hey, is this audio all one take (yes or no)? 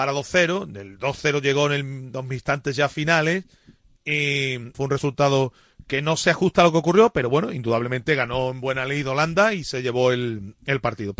no